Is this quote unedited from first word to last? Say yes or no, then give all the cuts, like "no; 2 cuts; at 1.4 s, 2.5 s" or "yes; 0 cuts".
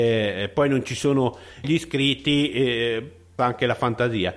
no; 2 cuts; at 1.6 s, 3.4 s